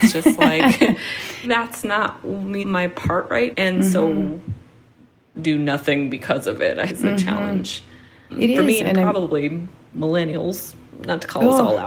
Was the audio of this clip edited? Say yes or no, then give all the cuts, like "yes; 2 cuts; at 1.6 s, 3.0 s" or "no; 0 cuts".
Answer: yes; 7 cuts; at 1.4 s, 2.6 s, 3.5 s, 5.3 s, 6.9 s, 8.3 s, 8.8 s